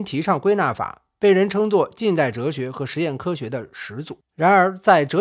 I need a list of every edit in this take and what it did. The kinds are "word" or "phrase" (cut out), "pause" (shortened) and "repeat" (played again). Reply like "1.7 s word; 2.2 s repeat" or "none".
4.3 s pause